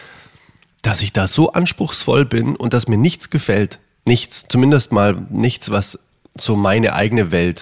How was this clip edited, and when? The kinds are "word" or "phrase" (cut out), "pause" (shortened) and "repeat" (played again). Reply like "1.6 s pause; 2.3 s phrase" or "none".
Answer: none